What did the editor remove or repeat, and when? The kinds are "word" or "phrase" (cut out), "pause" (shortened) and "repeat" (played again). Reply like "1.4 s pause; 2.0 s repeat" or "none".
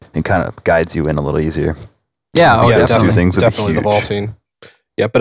none

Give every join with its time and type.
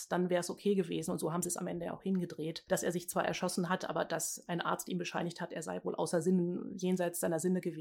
none

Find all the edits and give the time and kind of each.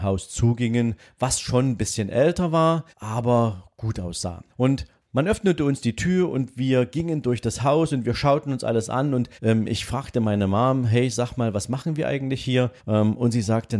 2.9 s pause; 4.5 s pause; 9.4 s pause; 12.8 s pause

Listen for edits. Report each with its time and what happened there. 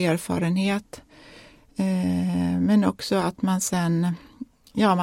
none

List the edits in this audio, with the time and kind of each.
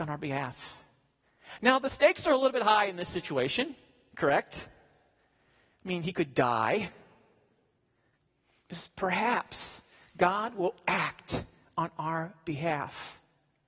none

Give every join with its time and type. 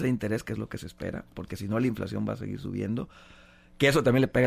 none

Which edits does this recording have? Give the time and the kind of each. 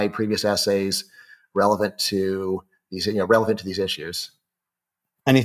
none

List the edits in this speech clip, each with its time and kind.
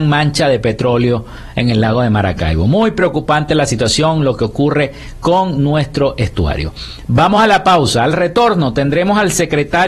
none

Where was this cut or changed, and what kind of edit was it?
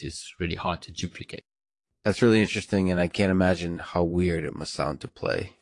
none

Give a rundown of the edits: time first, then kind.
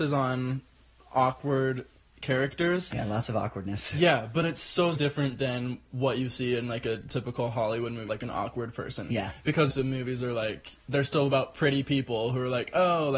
4.9 s word; 8.1 s word; 9.7 s phrase; 10.8 s pause

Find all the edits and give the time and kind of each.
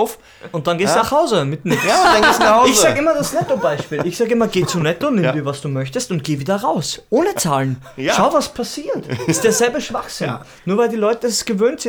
none

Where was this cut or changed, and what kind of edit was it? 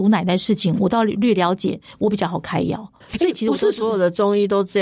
3.0 s pause

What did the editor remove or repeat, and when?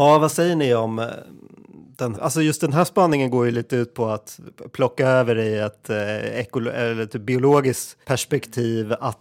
2.1 s word; 8.0 s pause

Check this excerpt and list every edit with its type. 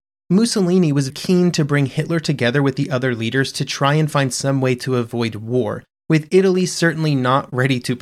1.1 s word

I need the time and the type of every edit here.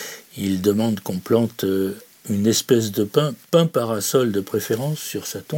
none

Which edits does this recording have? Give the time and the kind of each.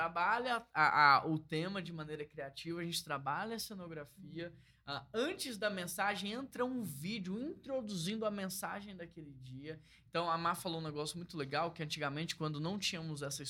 none

